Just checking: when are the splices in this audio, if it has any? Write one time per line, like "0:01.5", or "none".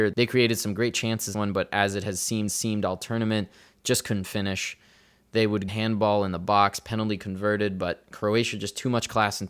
0:01.3
0:02.5
0:05.7